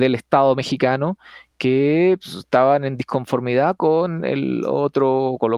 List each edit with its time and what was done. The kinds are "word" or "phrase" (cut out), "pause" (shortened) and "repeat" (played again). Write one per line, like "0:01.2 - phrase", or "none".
none